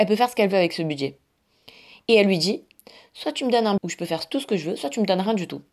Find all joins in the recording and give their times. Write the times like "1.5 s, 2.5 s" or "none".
3.8 s